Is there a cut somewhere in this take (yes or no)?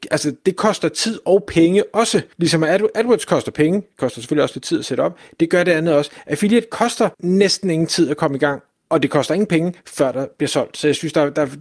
yes